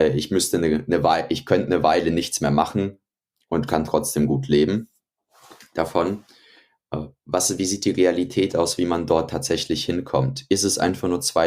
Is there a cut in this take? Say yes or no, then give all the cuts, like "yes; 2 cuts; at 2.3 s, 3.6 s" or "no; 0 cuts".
no; 0 cuts